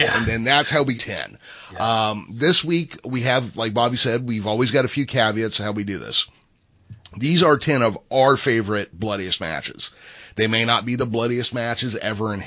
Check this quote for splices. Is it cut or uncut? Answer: cut